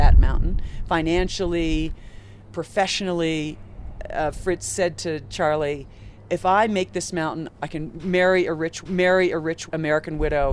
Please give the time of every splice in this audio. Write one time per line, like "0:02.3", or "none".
0:08.9